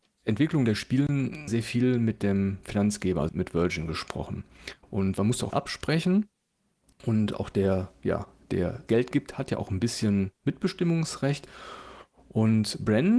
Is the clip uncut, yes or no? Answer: no